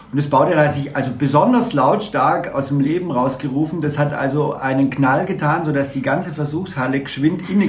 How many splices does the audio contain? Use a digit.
0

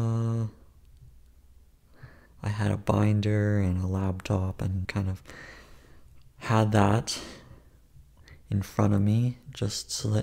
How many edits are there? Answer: 1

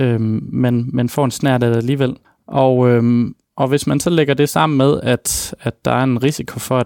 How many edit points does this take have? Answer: 2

